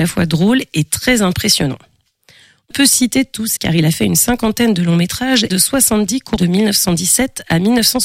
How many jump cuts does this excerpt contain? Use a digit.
4